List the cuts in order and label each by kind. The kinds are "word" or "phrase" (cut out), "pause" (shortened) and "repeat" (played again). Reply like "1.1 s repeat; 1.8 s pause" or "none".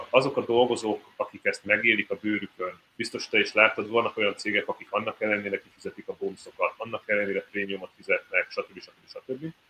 2.9 s pause